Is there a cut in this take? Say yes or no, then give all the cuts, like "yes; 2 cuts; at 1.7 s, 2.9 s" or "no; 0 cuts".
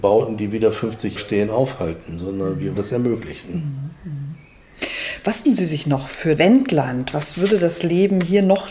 yes; 4 cuts; at 1.2 s, 2.8 s, 5.4 s, 6.4 s